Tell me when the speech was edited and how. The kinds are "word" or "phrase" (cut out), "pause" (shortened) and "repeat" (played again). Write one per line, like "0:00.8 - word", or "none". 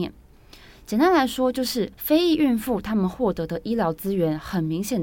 0:01.9 - pause